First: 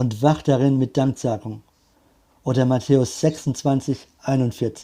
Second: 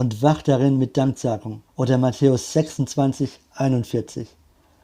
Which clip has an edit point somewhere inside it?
second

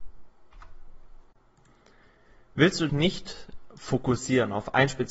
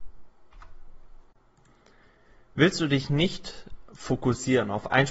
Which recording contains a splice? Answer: first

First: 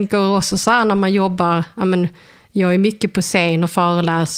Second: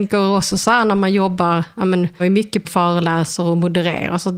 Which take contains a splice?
second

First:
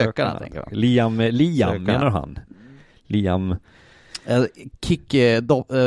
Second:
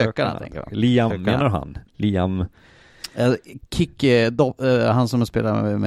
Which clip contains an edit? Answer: second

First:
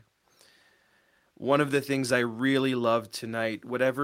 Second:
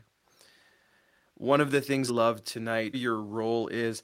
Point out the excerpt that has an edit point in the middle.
second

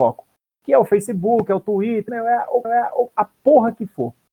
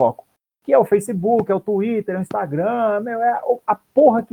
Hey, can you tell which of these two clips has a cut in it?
first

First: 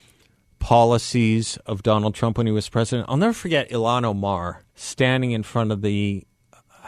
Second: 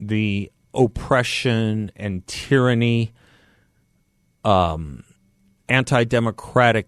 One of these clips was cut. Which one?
first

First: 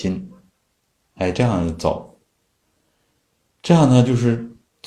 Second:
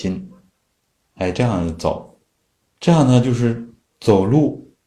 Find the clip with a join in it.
second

